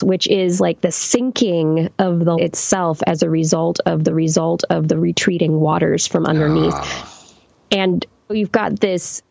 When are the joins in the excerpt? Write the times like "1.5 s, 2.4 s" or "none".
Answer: 2.4 s, 4.1 s, 8.3 s